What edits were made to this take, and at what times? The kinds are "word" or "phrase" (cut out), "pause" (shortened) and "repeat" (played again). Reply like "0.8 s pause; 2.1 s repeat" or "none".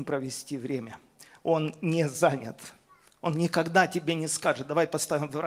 none